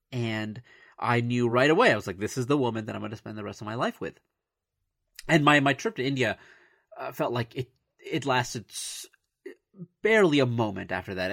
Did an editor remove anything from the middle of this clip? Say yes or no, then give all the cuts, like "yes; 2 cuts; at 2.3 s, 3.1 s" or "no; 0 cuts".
no; 0 cuts